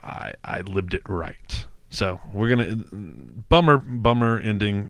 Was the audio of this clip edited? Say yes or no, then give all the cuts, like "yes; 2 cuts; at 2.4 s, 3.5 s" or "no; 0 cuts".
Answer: yes; 1 cut; at 1.8 s